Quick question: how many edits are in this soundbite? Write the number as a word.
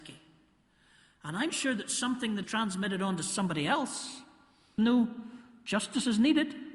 three